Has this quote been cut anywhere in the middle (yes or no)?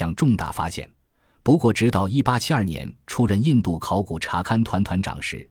no